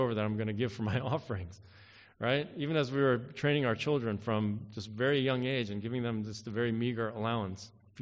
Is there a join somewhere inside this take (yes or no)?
no